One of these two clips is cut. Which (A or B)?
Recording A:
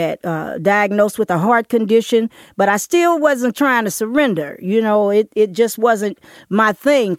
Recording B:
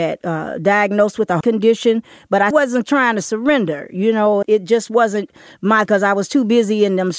B